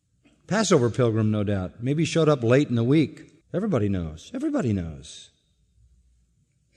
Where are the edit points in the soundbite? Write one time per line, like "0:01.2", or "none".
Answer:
0:03.4